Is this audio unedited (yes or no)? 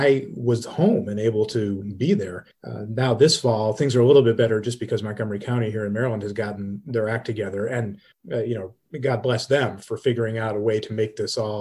no